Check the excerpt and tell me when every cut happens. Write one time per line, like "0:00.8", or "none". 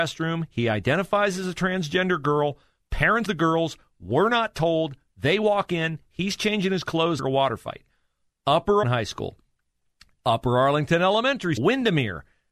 0:03.3
0:07.2
0:08.8
0:11.6